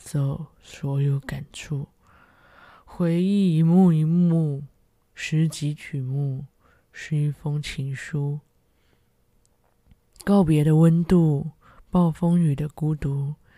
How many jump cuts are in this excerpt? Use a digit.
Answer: 0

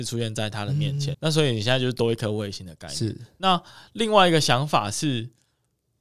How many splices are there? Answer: 1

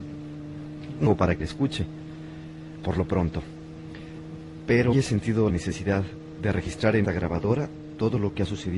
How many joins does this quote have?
5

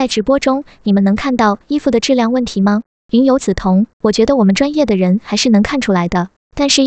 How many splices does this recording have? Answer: 2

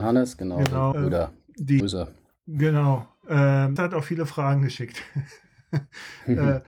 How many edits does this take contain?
3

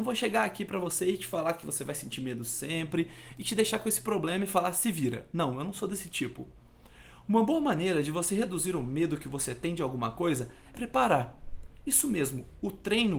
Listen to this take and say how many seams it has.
1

